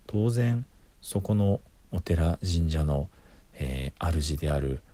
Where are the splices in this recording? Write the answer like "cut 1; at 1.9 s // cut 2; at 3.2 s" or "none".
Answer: none